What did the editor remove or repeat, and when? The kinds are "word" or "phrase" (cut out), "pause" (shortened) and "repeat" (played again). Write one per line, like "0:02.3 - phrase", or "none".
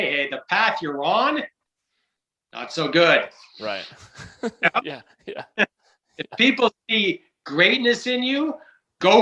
none